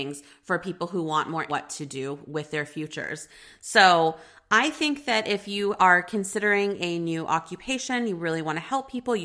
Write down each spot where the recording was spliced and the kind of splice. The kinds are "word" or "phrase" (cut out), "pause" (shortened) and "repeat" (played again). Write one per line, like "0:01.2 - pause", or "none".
0:01.5 - phrase